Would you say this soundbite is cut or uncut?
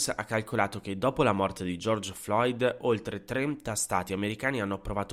uncut